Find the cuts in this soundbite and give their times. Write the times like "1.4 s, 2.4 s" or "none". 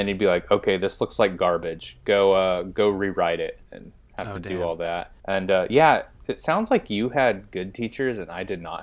3.7 s, 5.2 s